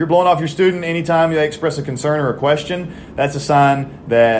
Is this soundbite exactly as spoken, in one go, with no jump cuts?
yes; 0 cuts

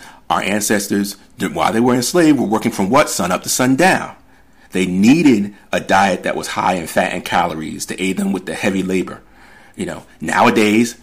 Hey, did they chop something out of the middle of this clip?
no; 0 cuts

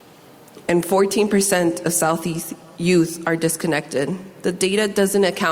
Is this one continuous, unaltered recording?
yes; 0 cuts

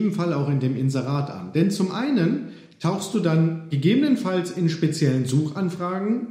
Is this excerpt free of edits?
yes; 0 cuts

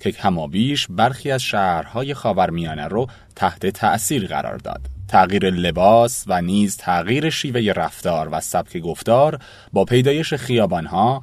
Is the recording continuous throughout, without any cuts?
yes; 0 cuts

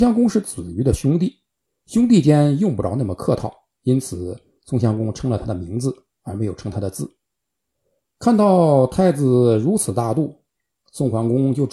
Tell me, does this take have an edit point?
no; 0 cuts

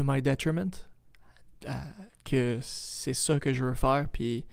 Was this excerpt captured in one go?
yes; 0 cuts

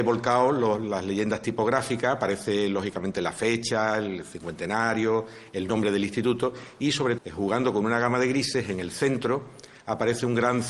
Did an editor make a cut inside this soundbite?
yes; 1 cut; at 7.2 s

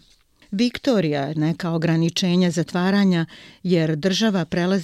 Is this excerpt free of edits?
no; 1 cut; at 1.3 s

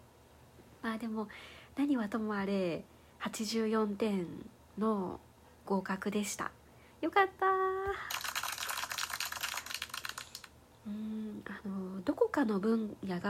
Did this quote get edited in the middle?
no; 0 cuts

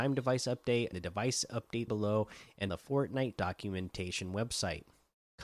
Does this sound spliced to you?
yes; 4 cuts; at 0.9 s, 1.9 s, 2.7 s, 3.4 s

